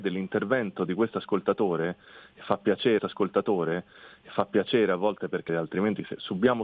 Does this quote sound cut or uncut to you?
cut